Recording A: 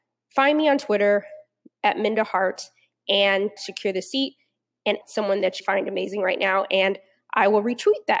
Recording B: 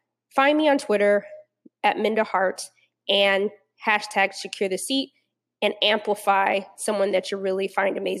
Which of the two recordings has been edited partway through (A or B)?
A